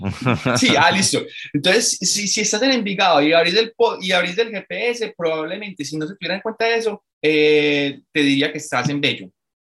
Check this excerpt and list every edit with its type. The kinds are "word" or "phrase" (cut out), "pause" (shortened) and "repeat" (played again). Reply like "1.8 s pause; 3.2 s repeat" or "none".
7.1 s pause